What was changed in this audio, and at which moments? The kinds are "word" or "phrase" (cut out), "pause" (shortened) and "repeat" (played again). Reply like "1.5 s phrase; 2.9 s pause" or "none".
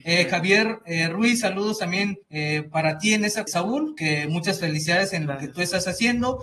2.2 s pause; 3.5 s word